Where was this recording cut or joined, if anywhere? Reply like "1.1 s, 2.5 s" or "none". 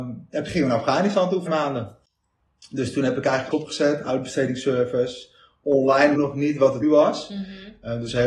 1.5 s, 3.5 s, 6.1 s, 6.8 s